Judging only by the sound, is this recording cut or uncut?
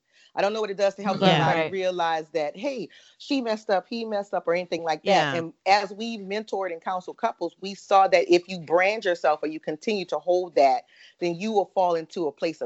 uncut